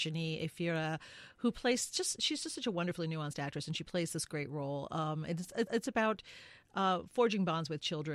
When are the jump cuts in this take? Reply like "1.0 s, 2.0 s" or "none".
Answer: 5.7 s